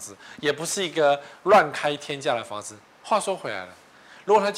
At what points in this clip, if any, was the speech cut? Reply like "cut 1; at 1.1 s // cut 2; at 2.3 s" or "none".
none